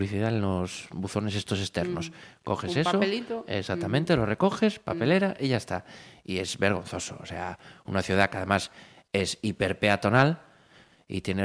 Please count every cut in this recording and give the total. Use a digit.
0